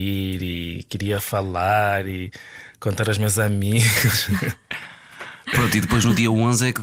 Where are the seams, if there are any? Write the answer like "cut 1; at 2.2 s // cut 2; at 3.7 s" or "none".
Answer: none